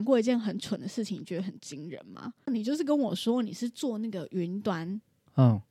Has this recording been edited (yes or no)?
no